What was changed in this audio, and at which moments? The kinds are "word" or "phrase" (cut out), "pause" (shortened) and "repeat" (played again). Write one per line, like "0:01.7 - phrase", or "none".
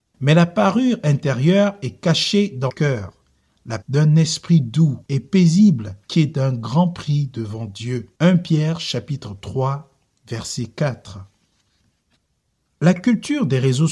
0:02.7 - word
0:03.8 - phrase
0:05.0 - pause
0:06.0 - pause
0:08.1 - pause

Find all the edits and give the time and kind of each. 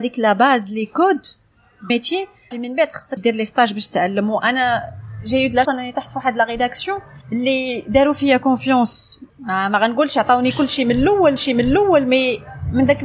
0:01.9 - word
0:02.5 - word
0:03.2 - word
0:05.6 - word
0:07.2 - pause
0:09.3 - pause
0:11.4 - repeat

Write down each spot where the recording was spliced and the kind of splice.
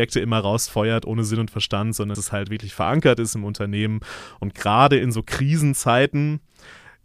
0:02.1 - word

